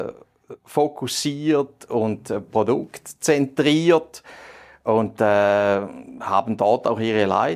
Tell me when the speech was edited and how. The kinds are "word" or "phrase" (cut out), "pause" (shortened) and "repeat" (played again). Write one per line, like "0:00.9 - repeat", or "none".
none